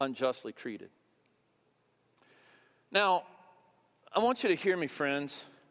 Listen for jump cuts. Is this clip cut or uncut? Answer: uncut